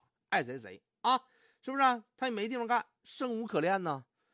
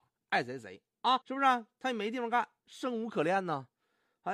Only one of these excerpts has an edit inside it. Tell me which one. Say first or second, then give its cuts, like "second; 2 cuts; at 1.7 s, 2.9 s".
second; 1 cut; at 1.2 s